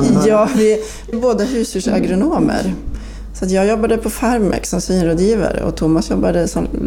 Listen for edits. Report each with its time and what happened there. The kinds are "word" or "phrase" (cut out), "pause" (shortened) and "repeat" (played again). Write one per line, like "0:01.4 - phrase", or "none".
0:01.1 - word